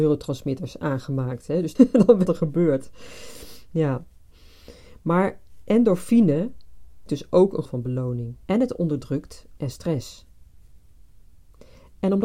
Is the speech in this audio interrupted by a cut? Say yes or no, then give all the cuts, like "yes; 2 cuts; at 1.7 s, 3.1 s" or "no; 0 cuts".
yes; 6 cuts; at 1.8 s, 2.3 s, 7.1 s, 7.7 s, 8.4 s, 9.6 s